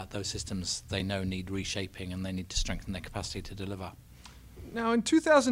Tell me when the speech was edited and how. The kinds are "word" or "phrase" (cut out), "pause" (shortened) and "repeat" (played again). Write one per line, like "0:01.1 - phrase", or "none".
none